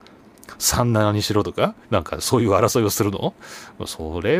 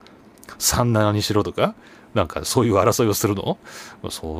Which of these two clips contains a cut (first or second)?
first